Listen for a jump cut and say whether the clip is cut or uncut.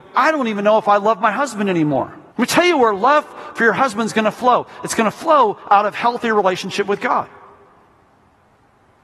cut